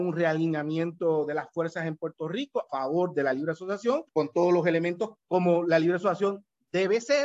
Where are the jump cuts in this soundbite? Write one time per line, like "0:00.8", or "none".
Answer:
0:02.7
0:04.1
0:05.1